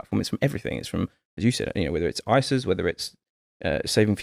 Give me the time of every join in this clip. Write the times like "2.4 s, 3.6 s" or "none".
none